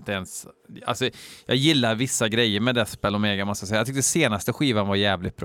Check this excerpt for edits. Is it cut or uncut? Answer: uncut